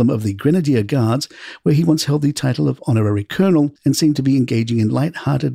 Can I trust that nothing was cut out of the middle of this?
no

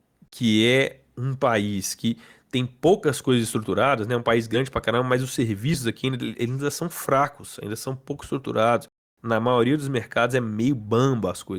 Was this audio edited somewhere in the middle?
no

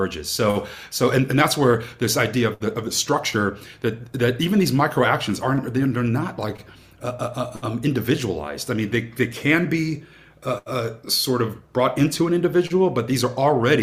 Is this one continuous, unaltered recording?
yes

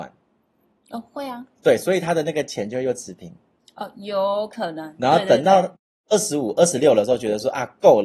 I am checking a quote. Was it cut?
no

